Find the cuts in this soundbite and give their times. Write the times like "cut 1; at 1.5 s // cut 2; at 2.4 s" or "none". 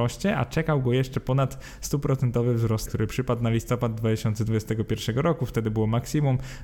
cut 1; at 2.8 s